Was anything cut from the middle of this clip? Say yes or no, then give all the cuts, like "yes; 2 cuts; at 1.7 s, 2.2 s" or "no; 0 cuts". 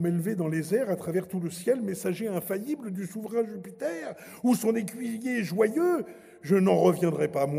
no; 0 cuts